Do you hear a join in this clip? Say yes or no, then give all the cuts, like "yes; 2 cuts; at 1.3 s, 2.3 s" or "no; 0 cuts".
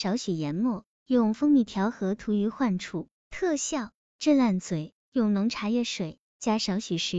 yes; 1 cut; at 5.0 s